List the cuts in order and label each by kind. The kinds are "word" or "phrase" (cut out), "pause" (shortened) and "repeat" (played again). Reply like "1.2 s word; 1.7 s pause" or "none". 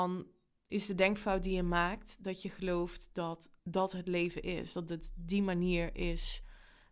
3.6 s pause